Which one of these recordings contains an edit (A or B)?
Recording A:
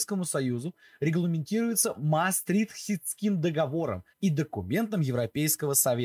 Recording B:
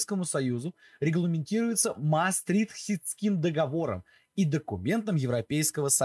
A